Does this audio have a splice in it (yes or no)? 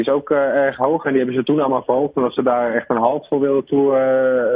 no